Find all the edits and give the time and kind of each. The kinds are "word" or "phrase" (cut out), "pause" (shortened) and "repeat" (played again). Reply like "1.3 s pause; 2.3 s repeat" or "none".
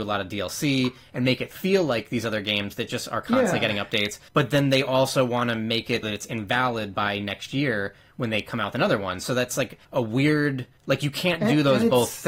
4.3 s pause; 6.0 s word; 9.8 s pause; 10.8 s pause